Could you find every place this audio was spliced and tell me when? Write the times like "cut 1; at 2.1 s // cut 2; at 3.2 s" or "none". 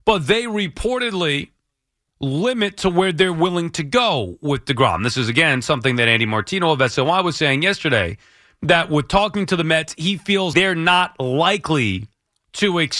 cut 1; at 2.1 s // cut 2; at 10.5 s